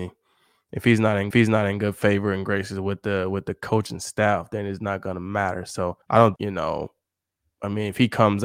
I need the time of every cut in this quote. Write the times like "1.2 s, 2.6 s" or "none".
1.3 s, 6.0 s, 6.4 s